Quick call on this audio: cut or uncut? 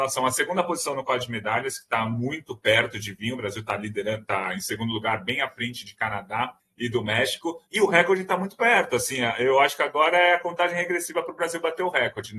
cut